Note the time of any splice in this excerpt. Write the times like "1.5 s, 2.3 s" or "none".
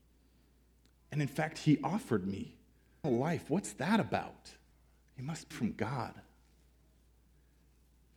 3.0 s, 4.7 s, 5.5 s

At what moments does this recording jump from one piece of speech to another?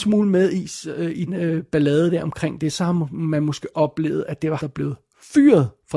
1.3 s, 3.7 s, 4.6 s

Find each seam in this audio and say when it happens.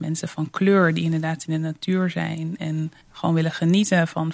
3.0 s

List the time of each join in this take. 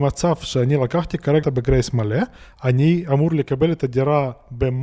1.4 s

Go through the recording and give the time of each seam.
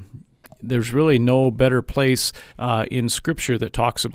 2.5 s

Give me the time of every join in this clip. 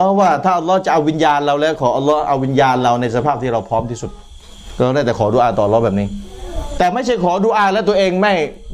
none

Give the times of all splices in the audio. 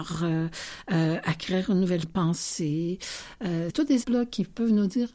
2.0 s, 3.7 s, 4.0 s

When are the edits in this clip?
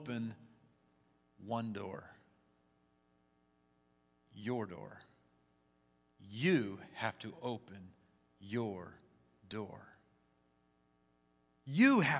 none

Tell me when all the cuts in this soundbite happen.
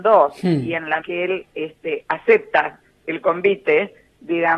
1.0 s

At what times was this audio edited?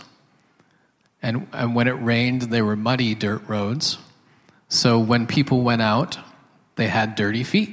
none

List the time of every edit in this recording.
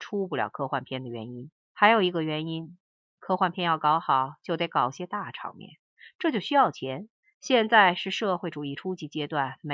1.6 s, 7.2 s

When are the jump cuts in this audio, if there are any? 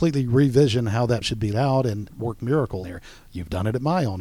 1.2 s, 1.5 s, 2.1 s, 2.8 s

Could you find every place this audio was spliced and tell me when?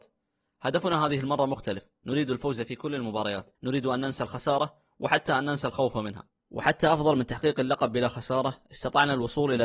3.5 s, 6.4 s

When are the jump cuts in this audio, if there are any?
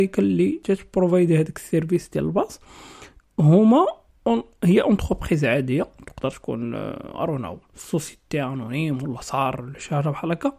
none

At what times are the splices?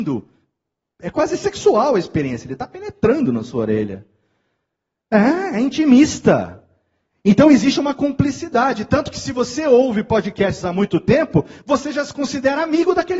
none

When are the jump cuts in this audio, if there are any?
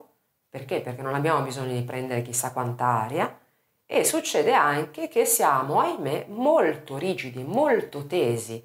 none

